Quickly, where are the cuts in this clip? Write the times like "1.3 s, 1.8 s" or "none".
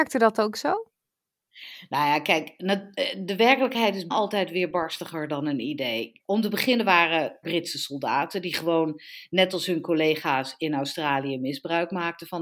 4.1 s, 6.2 s, 7.4 s